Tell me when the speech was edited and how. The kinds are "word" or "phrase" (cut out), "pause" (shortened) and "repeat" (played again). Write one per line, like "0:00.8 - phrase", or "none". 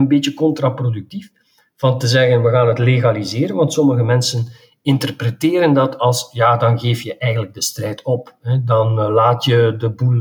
none